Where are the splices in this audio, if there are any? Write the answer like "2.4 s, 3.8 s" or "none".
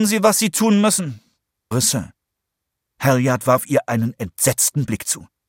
1.7 s